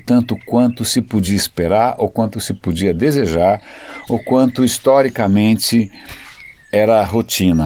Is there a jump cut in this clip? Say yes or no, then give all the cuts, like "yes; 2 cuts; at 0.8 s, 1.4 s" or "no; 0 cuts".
no; 0 cuts